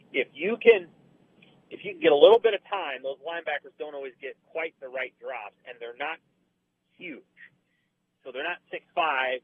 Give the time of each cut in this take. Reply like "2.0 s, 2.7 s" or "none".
none